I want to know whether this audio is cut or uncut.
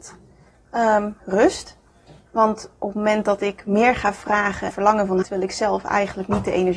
cut